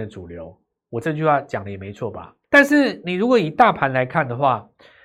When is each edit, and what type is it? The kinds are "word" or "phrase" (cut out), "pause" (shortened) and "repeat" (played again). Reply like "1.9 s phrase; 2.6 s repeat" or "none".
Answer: 2.4 s pause